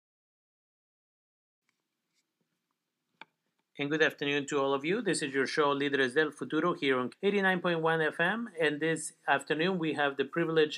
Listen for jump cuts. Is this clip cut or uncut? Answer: cut